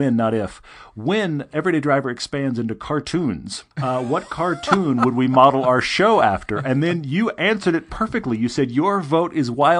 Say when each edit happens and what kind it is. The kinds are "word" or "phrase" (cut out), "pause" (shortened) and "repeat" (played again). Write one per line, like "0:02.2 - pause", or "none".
0:03.7 - pause